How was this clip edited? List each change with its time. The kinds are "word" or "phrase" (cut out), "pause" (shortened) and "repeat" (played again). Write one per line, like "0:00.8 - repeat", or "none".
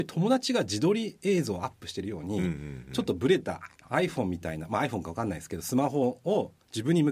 none